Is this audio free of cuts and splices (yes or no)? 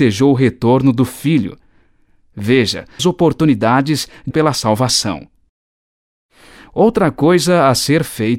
no